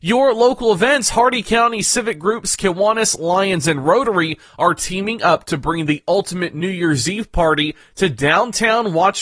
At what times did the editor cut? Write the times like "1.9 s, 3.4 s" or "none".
none